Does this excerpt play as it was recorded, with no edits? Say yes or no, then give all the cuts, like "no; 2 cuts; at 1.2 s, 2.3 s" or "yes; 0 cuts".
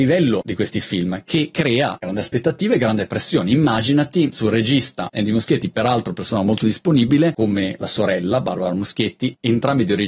yes; 0 cuts